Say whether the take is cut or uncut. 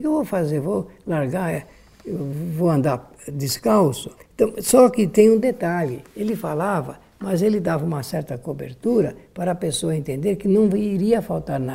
cut